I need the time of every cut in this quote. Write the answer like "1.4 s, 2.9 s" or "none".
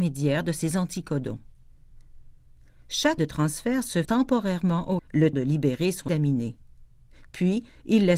3.2 s, 4.0 s, 5.0 s, 5.3 s, 6.1 s

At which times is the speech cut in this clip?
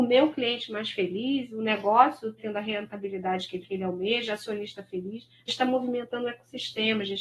2.4 s, 3.6 s, 5.5 s

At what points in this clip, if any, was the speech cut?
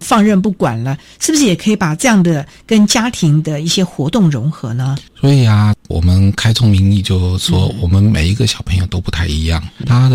5.1 s

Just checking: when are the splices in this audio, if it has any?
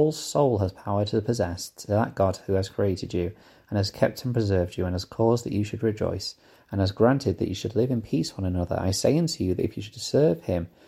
none

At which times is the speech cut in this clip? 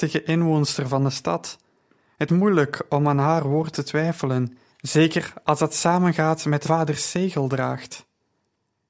2.3 s, 4.7 s, 6.6 s

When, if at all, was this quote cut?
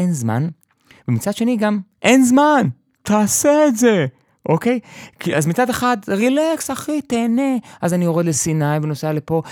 none

